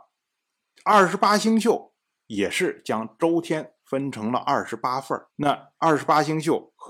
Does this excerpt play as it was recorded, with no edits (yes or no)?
no